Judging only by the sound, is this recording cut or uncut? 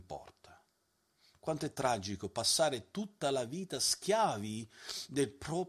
uncut